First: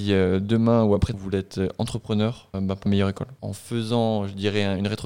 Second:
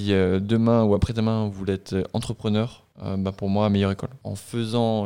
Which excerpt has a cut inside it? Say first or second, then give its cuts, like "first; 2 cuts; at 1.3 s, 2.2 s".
first; 3 cuts; at 1.1 s, 2.5 s, 2.9 s